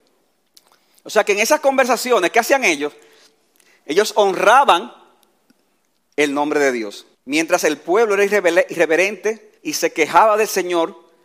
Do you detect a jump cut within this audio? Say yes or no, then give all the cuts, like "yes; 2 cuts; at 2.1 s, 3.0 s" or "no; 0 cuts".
yes; 2 cuts; at 7.1 s, 9.6 s